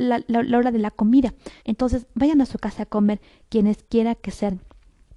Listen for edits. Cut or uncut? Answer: cut